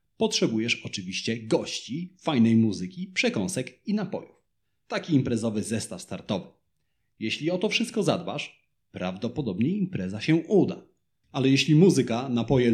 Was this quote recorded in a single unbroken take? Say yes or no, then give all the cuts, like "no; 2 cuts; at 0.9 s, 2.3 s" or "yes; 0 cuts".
yes; 0 cuts